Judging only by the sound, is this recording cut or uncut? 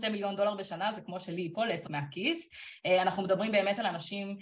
cut